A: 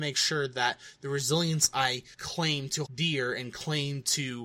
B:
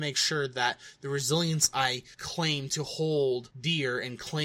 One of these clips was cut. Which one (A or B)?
A